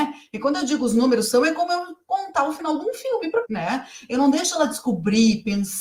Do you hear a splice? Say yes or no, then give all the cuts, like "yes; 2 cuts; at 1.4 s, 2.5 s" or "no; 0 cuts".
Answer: yes; 1 cut; at 3.4 s